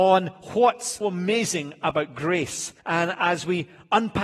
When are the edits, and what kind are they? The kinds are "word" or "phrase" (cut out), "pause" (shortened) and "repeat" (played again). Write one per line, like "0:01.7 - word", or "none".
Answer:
0:01.0 - word
0:02.8 - pause